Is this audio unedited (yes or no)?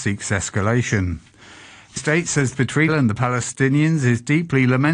no